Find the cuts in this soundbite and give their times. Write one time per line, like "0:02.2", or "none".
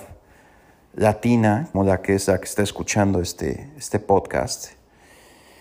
0:01.7